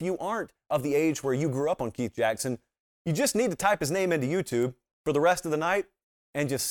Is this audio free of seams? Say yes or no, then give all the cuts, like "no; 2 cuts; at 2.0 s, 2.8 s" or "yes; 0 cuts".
yes; 0 cuts